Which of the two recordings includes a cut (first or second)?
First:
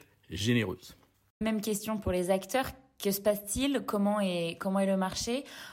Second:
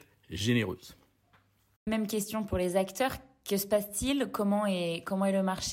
first